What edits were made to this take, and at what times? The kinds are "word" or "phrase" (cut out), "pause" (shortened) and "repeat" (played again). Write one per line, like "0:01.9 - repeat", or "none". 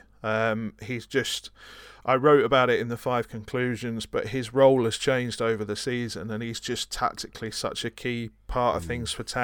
none